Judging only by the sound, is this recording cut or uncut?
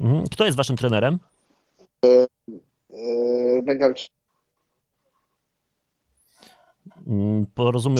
cut